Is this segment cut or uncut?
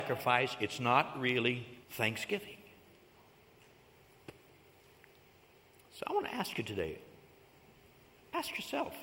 cut